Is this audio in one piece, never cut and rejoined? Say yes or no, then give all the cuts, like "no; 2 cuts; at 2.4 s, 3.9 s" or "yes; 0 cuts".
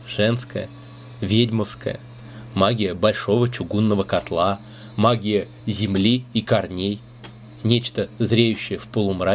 yes; 0 cuts